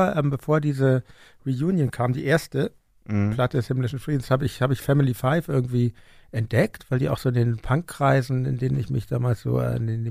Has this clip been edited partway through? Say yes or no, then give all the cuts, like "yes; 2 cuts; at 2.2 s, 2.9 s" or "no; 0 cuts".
no; 0 cuts